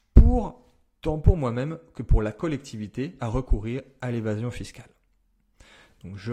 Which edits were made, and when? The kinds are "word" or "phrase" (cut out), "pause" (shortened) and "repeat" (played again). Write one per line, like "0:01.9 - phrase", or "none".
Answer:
0:03.2 - phrase